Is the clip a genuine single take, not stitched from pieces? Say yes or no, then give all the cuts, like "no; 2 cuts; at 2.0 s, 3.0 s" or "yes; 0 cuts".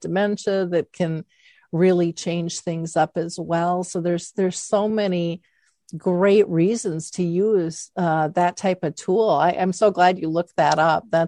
yes; 0 cuts